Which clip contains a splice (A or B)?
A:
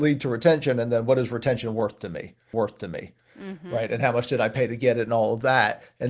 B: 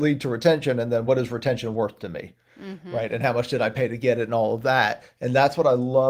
A